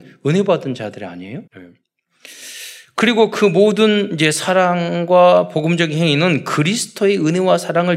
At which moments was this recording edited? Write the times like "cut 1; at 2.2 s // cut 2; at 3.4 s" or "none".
cut 1; at 1.5 s